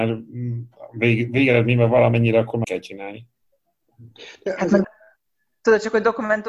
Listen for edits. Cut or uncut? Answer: cut